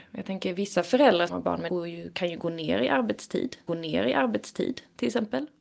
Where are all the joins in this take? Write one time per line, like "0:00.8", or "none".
0:01.3
0:01.7
0:03.7